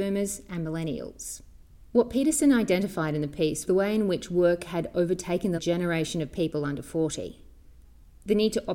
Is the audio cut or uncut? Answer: cut